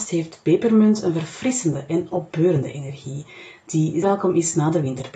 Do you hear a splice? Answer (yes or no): yes